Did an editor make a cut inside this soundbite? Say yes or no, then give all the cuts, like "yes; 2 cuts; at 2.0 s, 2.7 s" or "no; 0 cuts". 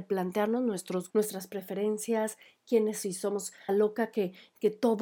yes; 3 cuts; at 1.1 s, 3.0 s, 3.7 s